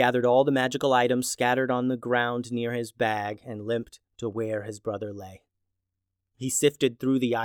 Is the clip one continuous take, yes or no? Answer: yes